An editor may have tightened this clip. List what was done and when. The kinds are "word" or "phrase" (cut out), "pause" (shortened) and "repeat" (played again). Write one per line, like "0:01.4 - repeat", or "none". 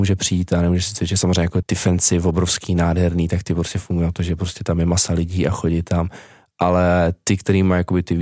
0:01.6 - word